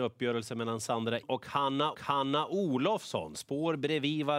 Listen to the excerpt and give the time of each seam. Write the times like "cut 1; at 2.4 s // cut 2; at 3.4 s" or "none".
cut 1; at 1.2 s // cut 2; at 1.9 s